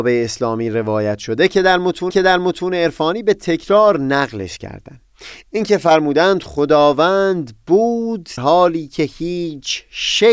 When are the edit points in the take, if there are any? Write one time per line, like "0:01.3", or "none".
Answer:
0:02.1
0:08.4